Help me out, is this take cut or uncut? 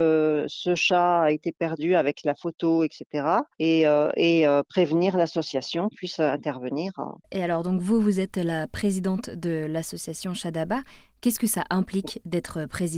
cut